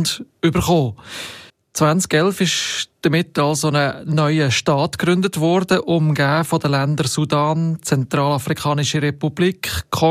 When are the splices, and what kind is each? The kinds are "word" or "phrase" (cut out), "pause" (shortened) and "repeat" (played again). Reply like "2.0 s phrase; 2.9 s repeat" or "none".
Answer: 1.5 s pause; 2.9 s pause

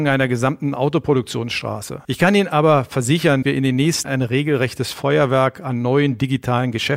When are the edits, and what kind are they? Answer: 2.0 s pause; 3.4 s word; 4.0 s word

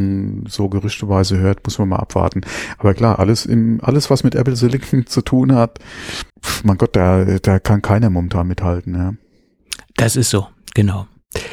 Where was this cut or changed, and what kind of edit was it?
6.3 s pause

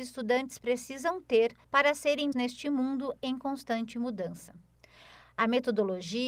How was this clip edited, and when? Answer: 1.6 s pause; 2.3 s word

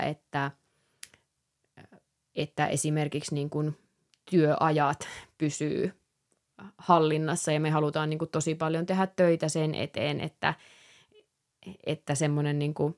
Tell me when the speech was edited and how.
none

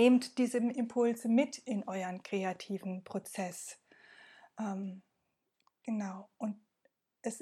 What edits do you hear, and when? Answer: none

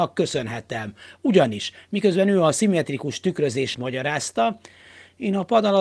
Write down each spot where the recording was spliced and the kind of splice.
3.7 s word

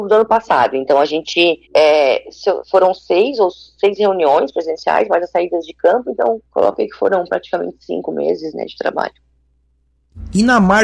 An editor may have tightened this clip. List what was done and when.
1.7 s pause; 6.5 s pause

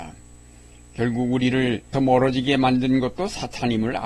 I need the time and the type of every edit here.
1.9 s word

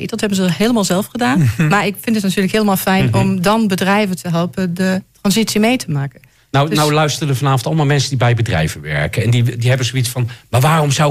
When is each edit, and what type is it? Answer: none

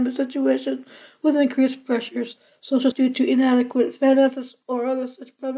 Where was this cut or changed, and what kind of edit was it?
2.9 s word

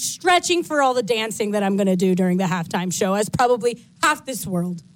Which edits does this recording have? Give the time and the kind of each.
none

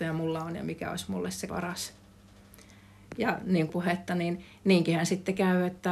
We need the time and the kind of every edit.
1.5 s word; 3.7 s phrase

